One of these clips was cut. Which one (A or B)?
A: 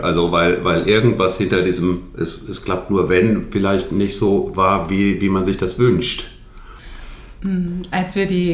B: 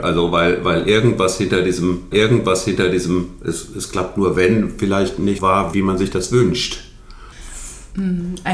B